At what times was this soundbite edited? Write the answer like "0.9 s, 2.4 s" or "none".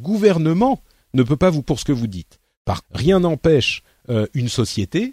1.6 s, 2.8 s